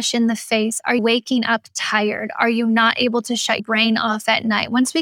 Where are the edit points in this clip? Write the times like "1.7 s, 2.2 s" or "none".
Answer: 1.0 s, 3.6 s

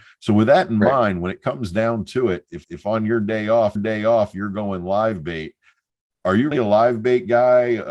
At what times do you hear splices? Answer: 2.6 s, 3.8 s, 6.5 s

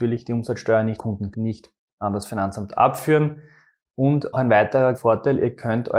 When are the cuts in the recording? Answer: 1.0 s, 1.3 s, 4.3 s, 4.9 s

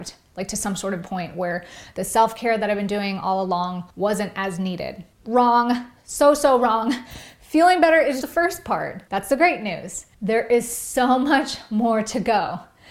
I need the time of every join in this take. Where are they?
1.0 s, 3.9 s, 5.1 s, 8.2 s, 9.1 s, 10.1 s

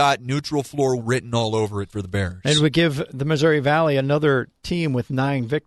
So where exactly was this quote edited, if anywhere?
1.0 s

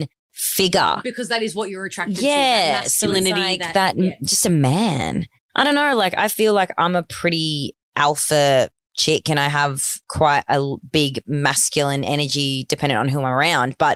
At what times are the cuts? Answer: 10.0 s

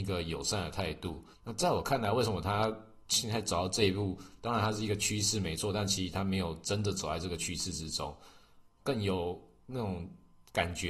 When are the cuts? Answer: 1.3 s

